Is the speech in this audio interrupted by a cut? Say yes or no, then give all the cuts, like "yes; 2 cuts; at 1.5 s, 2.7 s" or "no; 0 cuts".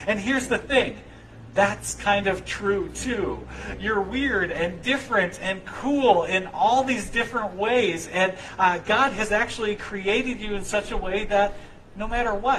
no; 0 cuts